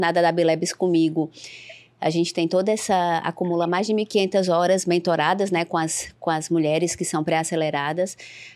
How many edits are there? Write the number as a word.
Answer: zero